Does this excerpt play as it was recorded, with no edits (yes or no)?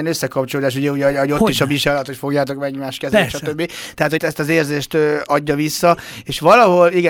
no